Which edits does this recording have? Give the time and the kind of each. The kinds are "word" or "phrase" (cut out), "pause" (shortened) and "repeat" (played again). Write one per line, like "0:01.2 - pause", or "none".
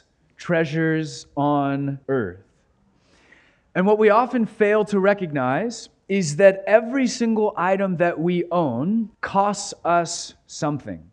0:02.0 - pause
0:09.1 - pause